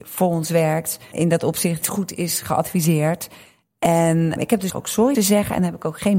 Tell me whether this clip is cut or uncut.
cut